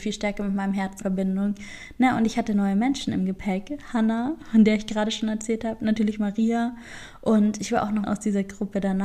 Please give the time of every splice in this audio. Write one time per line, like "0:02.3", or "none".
0:01.0
0:08.0